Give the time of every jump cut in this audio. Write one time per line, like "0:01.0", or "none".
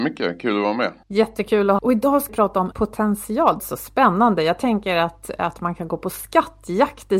0:01.0
0:01.8
0:02.3
0:02.7
0:03.6